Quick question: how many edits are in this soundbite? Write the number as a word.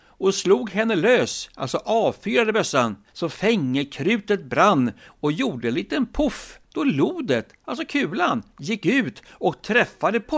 one